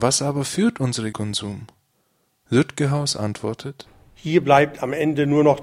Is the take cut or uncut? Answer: cut